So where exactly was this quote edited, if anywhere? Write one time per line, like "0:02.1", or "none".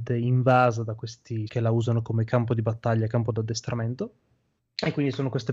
0:01.5